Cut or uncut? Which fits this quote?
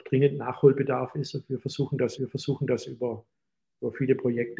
cut